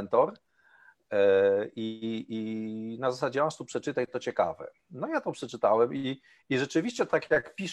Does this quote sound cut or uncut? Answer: uncut